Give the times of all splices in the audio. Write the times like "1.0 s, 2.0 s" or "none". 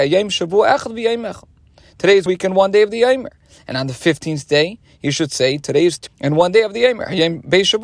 2.3 s, 6.1 s